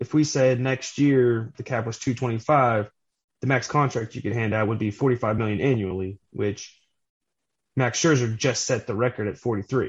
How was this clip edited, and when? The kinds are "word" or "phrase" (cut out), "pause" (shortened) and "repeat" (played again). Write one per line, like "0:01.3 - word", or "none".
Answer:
none

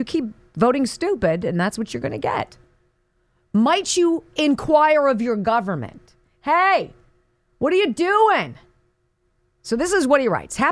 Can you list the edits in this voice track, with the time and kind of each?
none

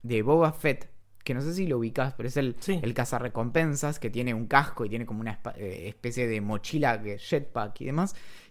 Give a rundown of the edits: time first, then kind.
none

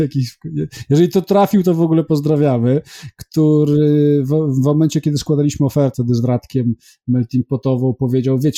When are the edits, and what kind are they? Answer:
0:05.9 - word

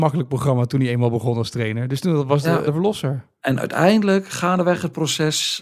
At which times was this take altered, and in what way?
0:02.6 - word
0:03.3 - pause

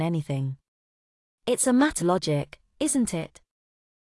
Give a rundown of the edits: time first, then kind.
0:02.0 - word

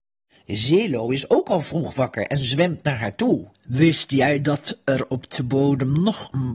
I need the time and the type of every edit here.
0:03.5 - pause

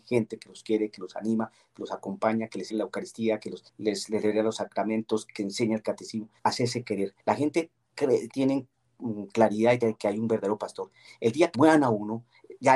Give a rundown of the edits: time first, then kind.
0:02.7 - word
0:03.7 - pause
0:05.4 - word
0:06.4 - pause
0:07.2 - pause
0:08.3 - word
0:09.8 - phrase
0:11.5 - word

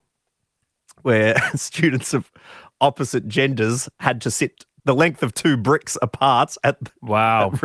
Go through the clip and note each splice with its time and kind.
none

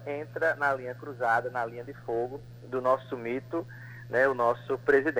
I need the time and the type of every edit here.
none

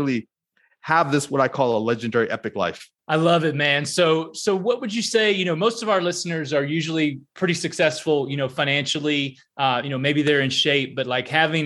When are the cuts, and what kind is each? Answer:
0:03.0 - pause

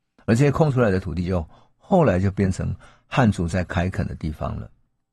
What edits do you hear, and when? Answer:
none

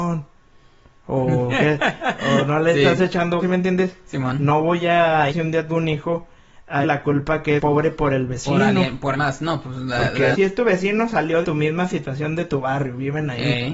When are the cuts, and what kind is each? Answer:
0:03.4 - word
0:05.3 - word
0:05.7 - word
0:06.8 - word
0:07.6 - word
0:09.1 - word
0:10.3 - word
0:11.4 - word

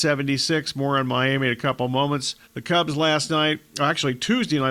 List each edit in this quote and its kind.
0:02.4 - pause
0:03.7 - pause

